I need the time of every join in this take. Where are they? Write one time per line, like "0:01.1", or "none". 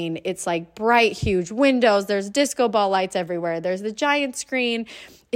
none